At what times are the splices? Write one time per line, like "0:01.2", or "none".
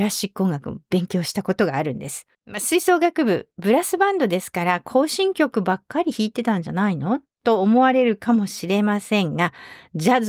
0:02.3